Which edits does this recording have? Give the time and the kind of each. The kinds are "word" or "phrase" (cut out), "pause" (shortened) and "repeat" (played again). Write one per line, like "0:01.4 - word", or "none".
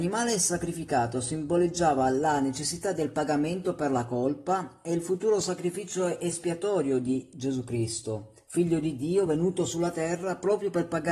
none